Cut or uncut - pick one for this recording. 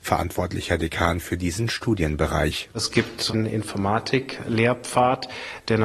cut